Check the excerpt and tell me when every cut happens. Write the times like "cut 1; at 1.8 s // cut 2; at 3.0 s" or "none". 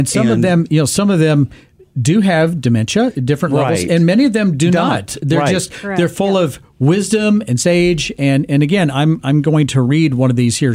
none